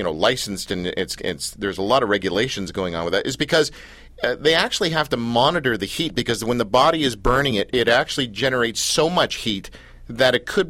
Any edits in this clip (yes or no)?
no